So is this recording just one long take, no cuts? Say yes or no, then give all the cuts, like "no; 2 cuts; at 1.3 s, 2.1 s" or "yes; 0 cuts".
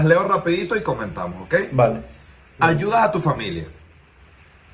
yes; 0 cuts